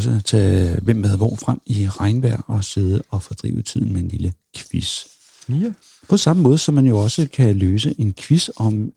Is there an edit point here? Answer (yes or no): no